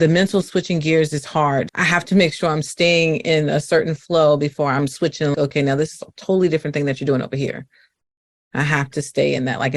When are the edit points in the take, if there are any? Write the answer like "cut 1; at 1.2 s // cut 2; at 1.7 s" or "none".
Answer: cut 1; at 1.7 s // cut 2; at 5.3 s

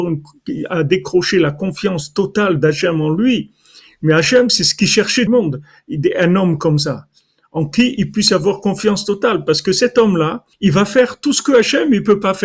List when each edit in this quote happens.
cut 1; at 5.3 s // cut 2; at 7.7 s // cut 3; at 10.5 s

